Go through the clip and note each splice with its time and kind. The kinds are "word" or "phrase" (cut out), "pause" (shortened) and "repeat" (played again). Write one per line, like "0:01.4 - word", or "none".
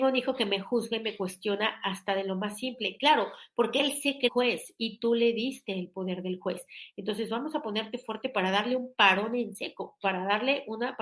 0:04.3 - word